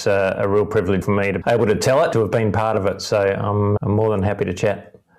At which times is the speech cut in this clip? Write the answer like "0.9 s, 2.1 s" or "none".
1.0 s, 1.4 s, 2.1 s, 3.8 s